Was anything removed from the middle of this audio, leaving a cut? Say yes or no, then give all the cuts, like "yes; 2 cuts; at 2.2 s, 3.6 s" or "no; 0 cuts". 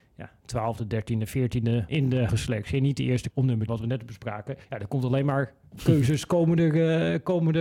yes; 5 cuts; at 1.9 s, 2.3 s, 3.3 s, 3.7 s, 4.6 s